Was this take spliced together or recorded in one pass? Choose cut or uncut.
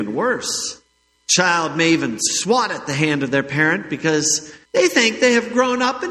cut